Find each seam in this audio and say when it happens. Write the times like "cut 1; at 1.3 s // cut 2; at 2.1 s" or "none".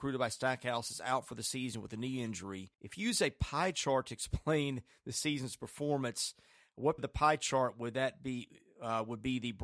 cut 1; at 2.7 s // cut 2; at 7.0 s